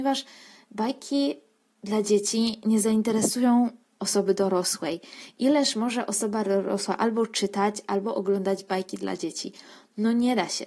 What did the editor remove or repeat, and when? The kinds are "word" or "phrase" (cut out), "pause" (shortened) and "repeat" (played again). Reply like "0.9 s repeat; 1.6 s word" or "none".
none